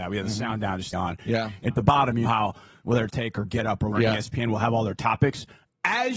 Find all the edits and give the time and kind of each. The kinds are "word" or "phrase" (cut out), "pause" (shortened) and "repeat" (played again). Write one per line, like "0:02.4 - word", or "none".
0:00.9 - word
0:01.7 - word
0:02.2 - word
0:03.1 - word
0:03.9 - word